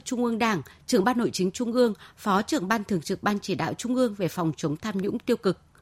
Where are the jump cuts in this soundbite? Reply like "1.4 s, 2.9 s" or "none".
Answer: none